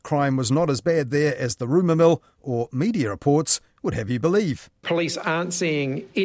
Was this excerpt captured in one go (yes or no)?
yes